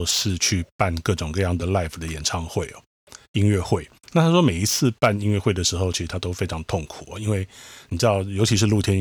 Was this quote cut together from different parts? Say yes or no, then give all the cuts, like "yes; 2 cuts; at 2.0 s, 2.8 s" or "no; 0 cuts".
no; 0 cuts